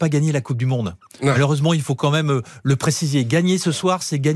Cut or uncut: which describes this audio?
uncut